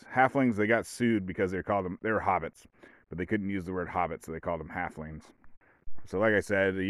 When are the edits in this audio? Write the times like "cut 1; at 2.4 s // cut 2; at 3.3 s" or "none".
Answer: none